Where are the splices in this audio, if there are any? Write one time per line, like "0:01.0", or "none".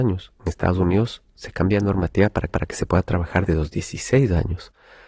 0:02.5
0:03.5